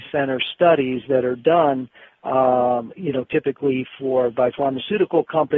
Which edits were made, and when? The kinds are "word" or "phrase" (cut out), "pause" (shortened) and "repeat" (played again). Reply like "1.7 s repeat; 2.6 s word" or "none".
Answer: none